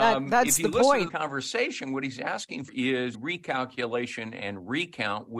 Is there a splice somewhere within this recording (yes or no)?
yes